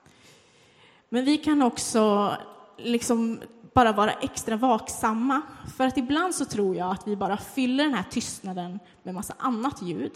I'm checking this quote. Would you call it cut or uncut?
uncut